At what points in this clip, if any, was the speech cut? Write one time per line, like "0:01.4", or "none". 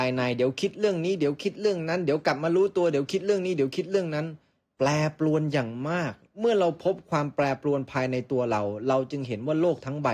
none